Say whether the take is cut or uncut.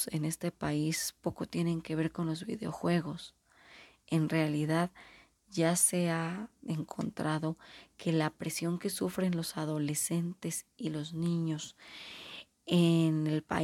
uncut